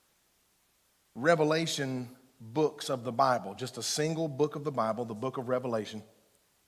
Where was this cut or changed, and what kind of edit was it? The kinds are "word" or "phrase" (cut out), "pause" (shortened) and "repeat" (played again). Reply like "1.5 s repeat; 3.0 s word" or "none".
none